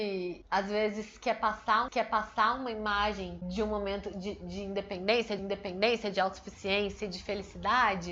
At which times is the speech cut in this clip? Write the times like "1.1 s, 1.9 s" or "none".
1.9 s, 5.4 s